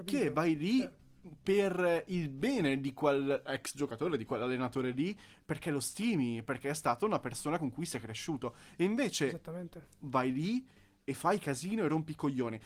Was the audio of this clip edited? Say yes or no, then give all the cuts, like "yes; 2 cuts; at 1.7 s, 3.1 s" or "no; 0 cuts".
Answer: no; 0 cuts